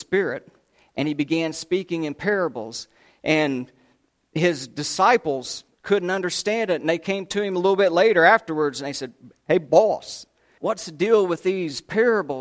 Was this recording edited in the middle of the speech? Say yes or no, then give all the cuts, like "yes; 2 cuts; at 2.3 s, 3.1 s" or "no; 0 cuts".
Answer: yes; 1 cut; at 10.6 s